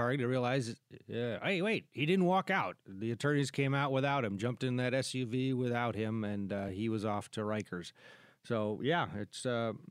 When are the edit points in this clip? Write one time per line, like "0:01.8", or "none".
none